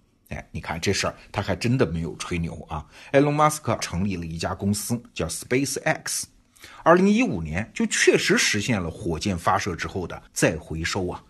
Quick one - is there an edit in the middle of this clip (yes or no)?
yes